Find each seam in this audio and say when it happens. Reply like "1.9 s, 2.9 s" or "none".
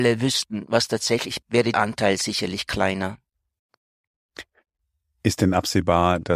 1.4 s, 1.7 s